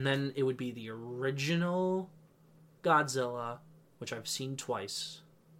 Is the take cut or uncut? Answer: uncut